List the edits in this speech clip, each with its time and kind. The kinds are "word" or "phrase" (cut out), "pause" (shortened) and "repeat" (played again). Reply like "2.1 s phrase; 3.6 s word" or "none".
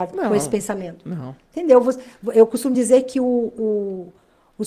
none